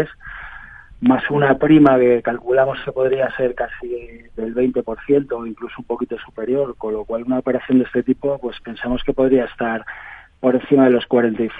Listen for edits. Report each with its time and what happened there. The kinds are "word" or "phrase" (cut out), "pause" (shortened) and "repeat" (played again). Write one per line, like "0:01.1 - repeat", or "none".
none